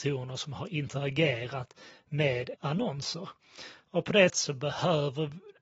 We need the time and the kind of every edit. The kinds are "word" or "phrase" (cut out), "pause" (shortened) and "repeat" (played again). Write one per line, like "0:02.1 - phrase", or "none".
0:02.5 - word
0:04.3 - word

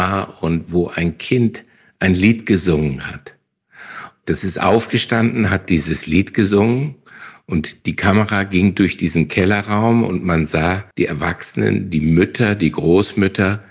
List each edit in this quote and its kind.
0:10.9 - pause

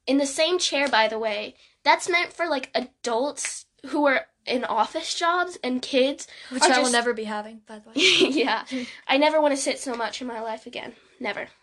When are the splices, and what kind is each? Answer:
0:09.0 - word

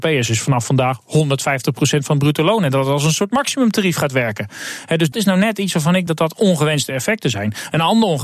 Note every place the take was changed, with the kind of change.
0:05.1 - word
0:06.1 - word

